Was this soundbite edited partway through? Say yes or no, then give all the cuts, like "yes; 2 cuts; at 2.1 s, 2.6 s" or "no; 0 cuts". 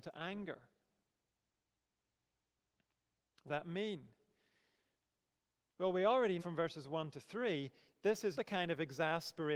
yes; 3 cuts; at 3.5 s, 6.4 s, 8.3 s